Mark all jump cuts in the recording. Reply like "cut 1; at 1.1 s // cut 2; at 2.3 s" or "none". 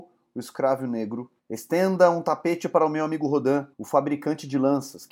cut 1; at 1.4 s // cut 2; at 3.7 s